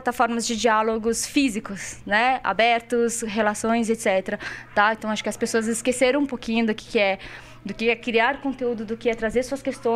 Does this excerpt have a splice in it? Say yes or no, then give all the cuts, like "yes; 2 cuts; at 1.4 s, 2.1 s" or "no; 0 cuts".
no; 0 cuts